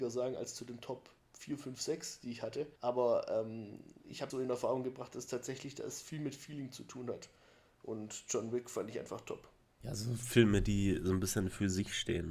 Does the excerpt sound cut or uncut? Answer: cut